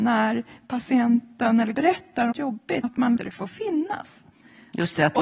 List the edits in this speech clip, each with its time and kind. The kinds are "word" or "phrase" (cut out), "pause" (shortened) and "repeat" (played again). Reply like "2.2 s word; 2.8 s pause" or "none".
1.7 s word; 2.3 s word; 2.8 s word; 3.2 s word